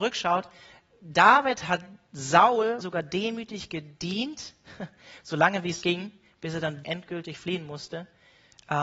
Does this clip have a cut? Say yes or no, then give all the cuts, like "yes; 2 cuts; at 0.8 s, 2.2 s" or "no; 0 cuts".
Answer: yes; 3 cuts; at 2.8 s, 5.8 s, 6.8 s